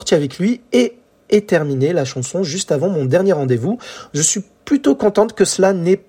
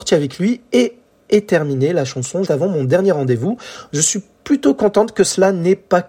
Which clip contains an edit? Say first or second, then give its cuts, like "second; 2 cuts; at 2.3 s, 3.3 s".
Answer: second; 1 cut; at 2.4 s